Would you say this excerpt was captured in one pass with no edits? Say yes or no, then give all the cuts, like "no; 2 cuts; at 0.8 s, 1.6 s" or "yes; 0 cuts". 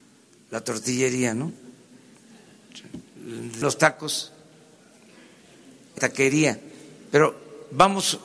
no; 3 cuts; at 3.1 s, 3.6 s, 6.0 s